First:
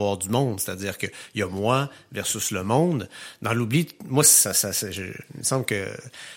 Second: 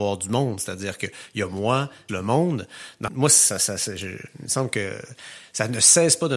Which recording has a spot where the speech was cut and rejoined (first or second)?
second